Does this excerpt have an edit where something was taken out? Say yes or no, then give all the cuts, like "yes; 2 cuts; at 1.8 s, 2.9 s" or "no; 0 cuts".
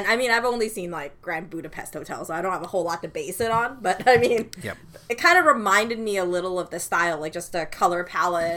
no; 0 cuts